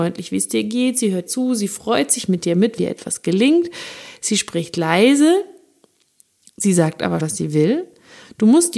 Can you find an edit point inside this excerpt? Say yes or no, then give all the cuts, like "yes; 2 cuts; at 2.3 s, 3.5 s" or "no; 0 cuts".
yes; 3 cuts; at 1.3 s, 2.8 s, 7.2 s